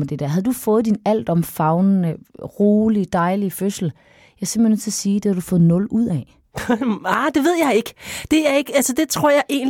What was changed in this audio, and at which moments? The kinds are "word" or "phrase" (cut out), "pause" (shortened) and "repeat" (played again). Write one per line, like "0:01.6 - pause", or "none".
none

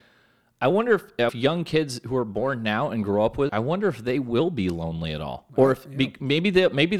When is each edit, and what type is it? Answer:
0:01.3 - phrase
0:03.5 - word

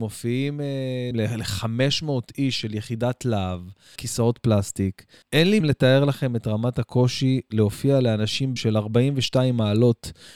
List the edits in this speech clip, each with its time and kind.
0:01.1 - word
0:04.0 - phrase
0:05.2 - pause
0:05.6 - word
0:08.6 - word

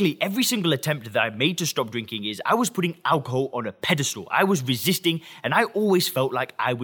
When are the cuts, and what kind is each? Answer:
none

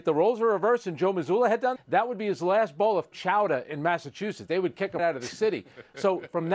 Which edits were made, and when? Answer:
0:01.8 - word
0:03.1 - word
0:05.0 - word

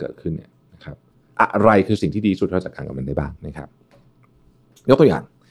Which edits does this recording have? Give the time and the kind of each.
0:03.4 - pause

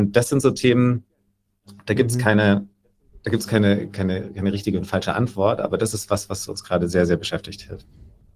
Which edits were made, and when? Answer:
none

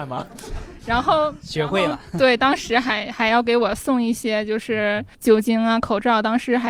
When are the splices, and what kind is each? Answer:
0:05.1 - pause

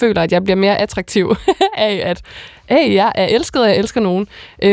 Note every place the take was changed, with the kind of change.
none

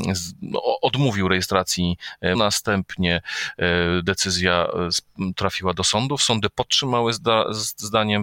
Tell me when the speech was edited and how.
0:02.3 - word

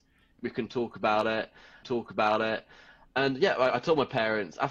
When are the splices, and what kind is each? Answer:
0:01.8 - repeat

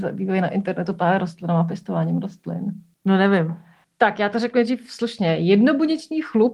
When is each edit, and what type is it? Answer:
none

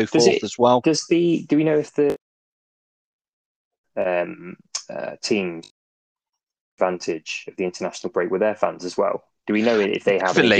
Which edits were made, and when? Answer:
none

